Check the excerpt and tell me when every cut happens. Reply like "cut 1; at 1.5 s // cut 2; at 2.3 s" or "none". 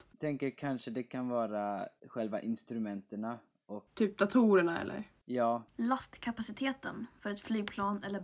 cut 1; at 3.9 s // cut 2; at 5.7 s

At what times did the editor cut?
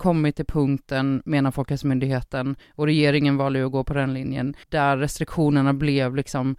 cut 1; at 4.6 s

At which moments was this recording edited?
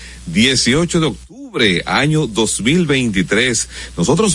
none

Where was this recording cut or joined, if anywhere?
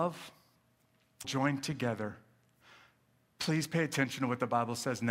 cut 1; at 1.2 s

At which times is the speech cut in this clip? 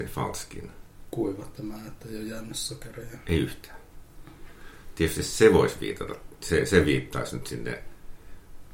none

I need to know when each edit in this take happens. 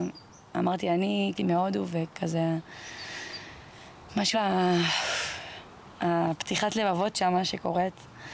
cut 1; at 1.4 s // cut 2; at 4.3 s

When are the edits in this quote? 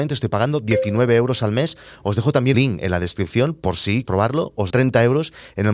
cut 1; at 2.5 s // cut 2; at 4.0 s // cut 3; at 4.7 s

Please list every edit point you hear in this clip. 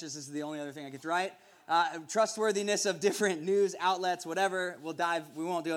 cut 1; at 1.0 s

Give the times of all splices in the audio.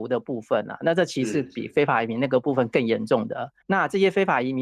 cut 1; at 3.6 s

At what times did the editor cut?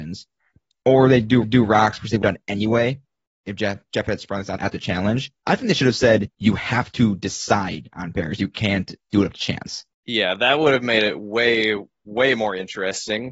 cut 1; at 1.4 s // cut 2; at 2.2 s // cut 3; at 4.6 s // cut 4; at 5.4 s // cut 5; at 6.3 s // cut 6; at 9.9 s

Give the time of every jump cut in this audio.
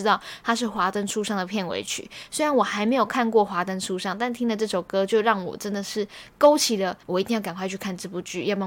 cut 1; at 7.0 s

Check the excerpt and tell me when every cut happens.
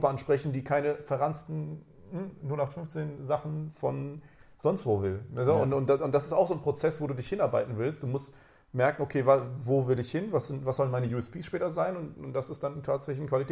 none

